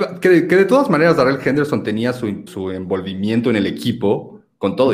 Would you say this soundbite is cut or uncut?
cut